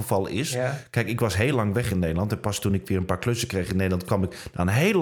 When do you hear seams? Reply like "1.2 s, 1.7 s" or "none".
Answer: none